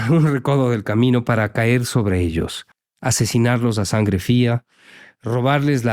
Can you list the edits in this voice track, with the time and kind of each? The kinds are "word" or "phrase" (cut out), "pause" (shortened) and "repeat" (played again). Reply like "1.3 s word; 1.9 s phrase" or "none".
2.7 s pause